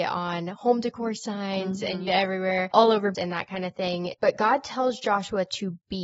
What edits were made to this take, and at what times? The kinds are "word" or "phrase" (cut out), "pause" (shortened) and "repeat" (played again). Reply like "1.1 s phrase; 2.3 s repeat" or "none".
2.1 s phrase; 3.1 s word